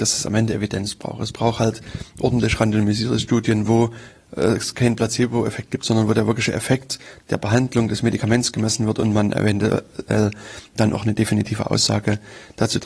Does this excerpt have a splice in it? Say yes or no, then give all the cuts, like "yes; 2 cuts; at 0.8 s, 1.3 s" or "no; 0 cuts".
no; 0 cuts